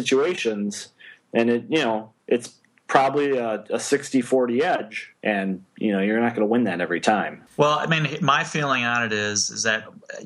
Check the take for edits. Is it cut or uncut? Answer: cut